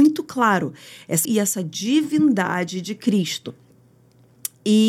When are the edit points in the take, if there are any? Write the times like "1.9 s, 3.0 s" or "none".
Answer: 1.2 s